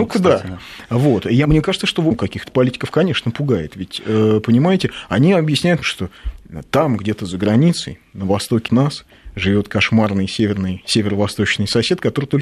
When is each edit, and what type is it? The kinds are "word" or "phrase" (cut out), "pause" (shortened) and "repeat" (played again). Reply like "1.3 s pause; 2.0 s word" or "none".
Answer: 1.4 s word; 2.1 s word; 5.8 s word; 8.7 s word